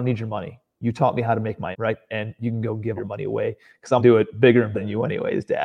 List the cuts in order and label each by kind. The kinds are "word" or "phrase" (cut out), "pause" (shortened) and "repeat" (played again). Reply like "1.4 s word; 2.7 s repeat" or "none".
1.7 s word; 3.0 s word; 4.0 s word; 4.7 s word

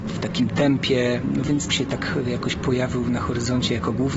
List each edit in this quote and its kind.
1.7 s phrase

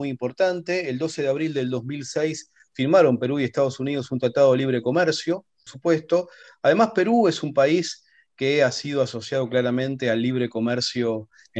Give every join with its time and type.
5.7 s phrase

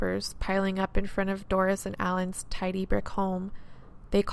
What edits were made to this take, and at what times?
none

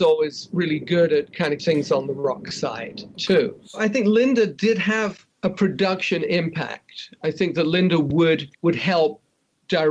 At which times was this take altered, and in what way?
1.6 s word; 5.3 s pause; 8.5 s pause

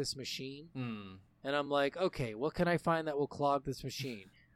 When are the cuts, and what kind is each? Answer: none

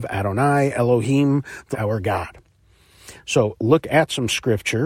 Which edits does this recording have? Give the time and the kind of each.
1.7 s word; 3.6 s word

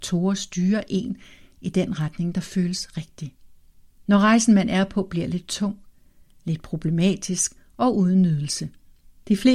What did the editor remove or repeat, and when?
none

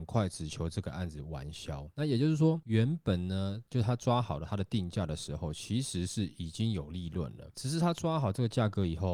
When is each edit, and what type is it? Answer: none

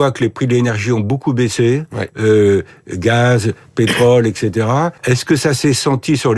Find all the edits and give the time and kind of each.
5.0 s pause

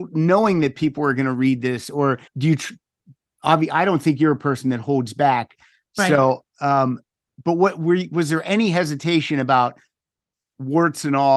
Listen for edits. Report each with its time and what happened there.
2.3 s pause

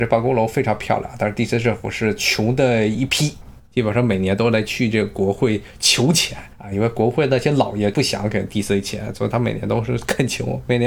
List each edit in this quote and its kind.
3.6 s pause; 6.5 s pause

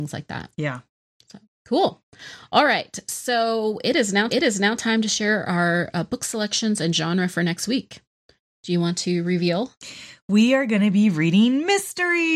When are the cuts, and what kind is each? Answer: 4.3 s repeat

